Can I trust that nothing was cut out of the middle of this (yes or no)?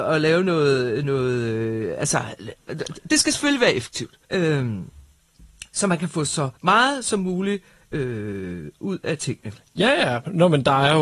no